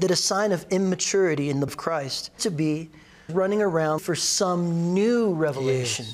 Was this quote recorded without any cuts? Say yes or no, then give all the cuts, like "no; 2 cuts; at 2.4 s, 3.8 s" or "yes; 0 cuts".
no; 4 cuts; at 1.7 s, 2.4 s, 3.3 s, 4.0 s